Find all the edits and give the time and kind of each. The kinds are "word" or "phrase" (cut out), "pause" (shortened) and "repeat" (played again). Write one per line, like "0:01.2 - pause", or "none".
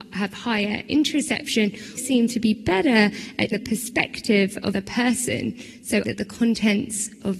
0:02.0 - word
0:03.5 - word
0:04.7 - word
0:06.0 - word

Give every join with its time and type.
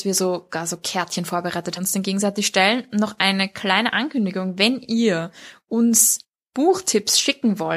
0:01.8 - phrase

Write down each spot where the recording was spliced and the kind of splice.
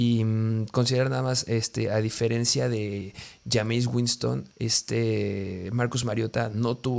0:04.5 - pause

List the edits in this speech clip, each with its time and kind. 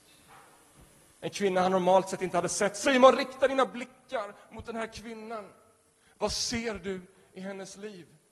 none

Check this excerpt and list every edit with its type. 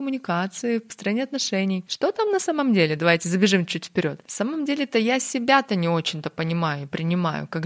none

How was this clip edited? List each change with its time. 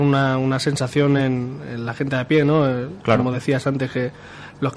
none

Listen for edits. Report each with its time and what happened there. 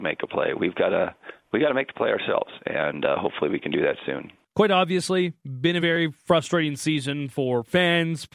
none

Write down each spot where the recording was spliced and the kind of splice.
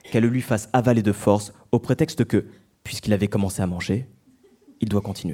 none

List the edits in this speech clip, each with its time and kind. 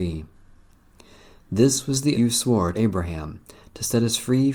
0:02.1 - word
0:02.7 - phrase

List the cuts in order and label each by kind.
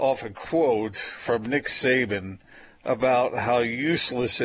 none

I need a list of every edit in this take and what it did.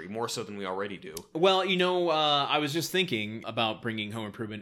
0:03.4 - word

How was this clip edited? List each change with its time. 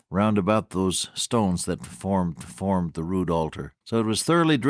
0:02.4 - repeat
0:03.8 - pause

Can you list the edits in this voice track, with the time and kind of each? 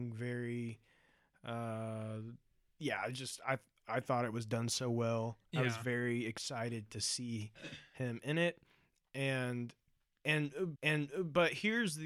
0:10.8 - repeat

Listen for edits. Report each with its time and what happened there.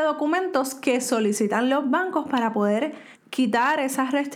0:03.1 - pause

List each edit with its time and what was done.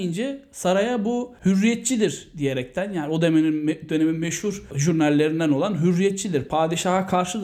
none

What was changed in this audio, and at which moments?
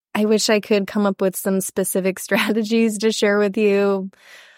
none

